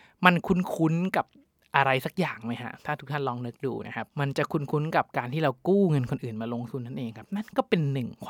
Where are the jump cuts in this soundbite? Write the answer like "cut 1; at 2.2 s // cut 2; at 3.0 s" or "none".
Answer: cut 1; at 4.1 s